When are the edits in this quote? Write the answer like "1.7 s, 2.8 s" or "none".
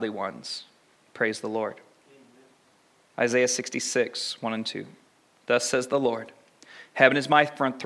none